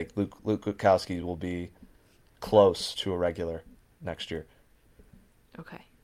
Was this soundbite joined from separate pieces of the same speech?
no; 0 cuts

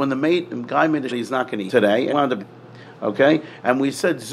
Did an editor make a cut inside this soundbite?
yes; 4 cuts; at 1.1 s, 1.7 s, 2.1 s, 2.4 s

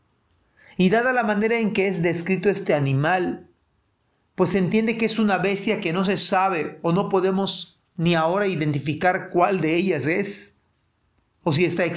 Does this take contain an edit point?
yes; 1 cut; at 7.9 s

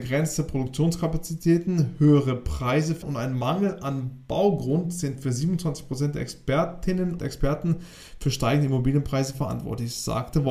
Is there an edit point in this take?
yes; 2 cuts; at 3.0 s, 7.2 s

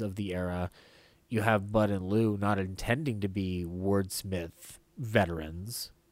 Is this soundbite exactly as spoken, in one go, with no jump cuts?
yes; 0 cuts

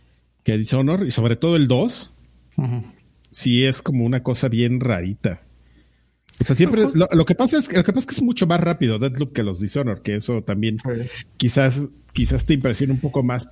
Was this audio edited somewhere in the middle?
no; 0 cuts

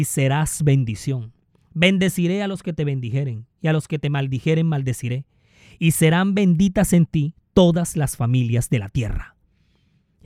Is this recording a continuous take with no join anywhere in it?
yes; 0 cuts

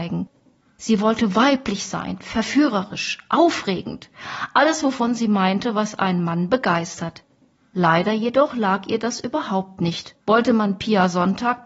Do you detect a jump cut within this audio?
yes; 1 cut; at 10.2 s

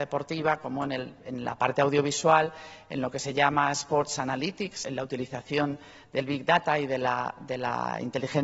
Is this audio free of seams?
no; 1 cut; at 4.8 s

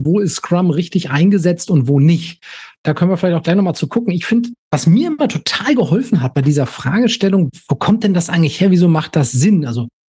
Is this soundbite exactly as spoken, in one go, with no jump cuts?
no; 1 cut; at 4.6 s

